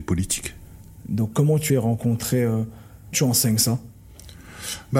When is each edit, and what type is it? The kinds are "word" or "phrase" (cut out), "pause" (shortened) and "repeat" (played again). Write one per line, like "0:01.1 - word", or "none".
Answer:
0:01.7 - word
0:03.1 - word